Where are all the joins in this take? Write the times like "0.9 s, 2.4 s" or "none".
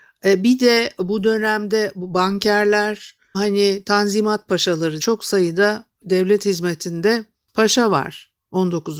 3.3 s, 5.0 s